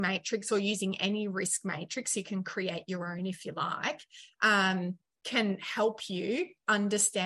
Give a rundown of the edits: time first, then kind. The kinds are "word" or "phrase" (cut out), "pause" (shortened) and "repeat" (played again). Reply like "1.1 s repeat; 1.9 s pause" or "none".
none